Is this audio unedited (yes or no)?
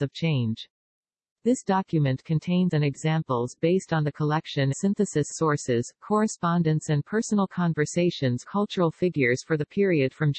no